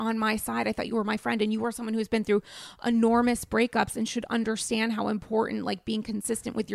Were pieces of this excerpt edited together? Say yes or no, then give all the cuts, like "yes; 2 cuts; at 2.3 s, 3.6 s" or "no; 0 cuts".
no; 0 cuts